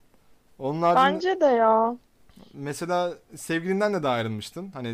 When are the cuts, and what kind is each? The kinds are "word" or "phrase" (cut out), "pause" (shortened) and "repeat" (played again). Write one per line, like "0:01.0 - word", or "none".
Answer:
none

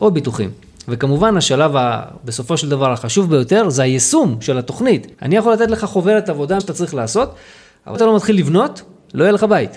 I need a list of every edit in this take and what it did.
0:05.1 - pause
0:06.6 - phrase
0:07.9 - word

